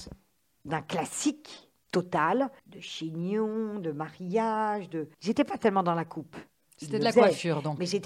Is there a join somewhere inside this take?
yes; 3 cuts; at 2.6 s, 5.1 s, 6.7 s

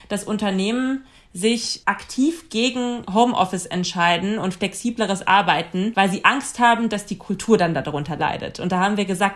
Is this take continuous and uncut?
yes; 0 cuts

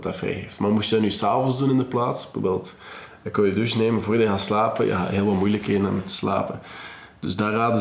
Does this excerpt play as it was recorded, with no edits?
yes; 0 cuts

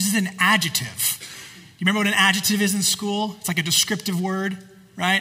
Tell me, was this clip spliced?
no; 0 cuts

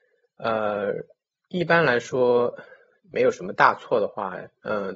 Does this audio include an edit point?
no; 0 cuts

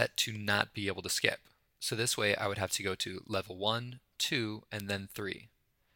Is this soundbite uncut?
yes; 0 cuts

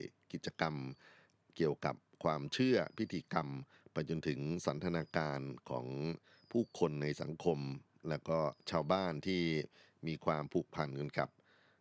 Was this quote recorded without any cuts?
yes; 0 cuts

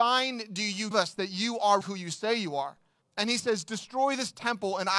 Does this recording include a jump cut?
yes; 3 cuts; at 0.9 s, 1.8 s, 3.0 s

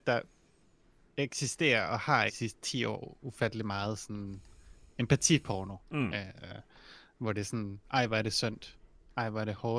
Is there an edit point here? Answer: yes; 3 cuts; at 2.3 s, 5.8 s, 7.8 s

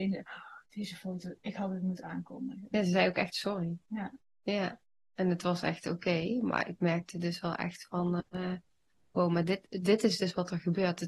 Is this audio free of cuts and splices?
yes; 0 cuts

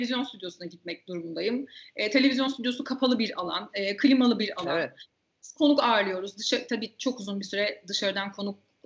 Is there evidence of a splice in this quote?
no; 0 cuts

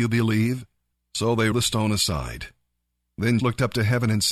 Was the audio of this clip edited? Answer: yes; 3 cuts; at 0.9 s, 1.5 s, 3.4 s

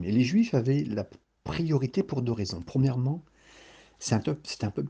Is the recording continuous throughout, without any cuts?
yes; 0 cuts

